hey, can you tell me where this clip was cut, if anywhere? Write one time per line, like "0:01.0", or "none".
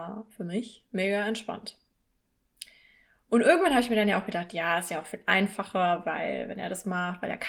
none